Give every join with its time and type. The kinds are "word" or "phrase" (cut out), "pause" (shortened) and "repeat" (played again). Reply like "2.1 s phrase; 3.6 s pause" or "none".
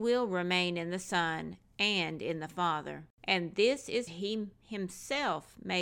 3.2 s pause; 4.1 s phrase